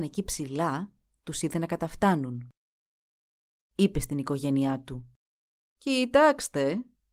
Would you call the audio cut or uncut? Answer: uncut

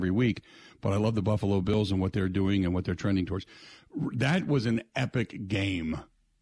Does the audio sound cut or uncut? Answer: uncut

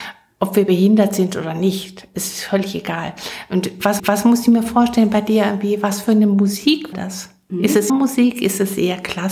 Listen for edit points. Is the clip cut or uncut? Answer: cut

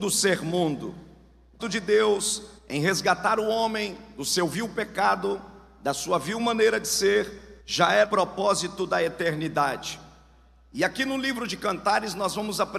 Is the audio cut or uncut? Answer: cut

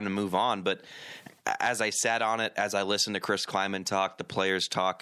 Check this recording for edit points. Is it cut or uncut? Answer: uncut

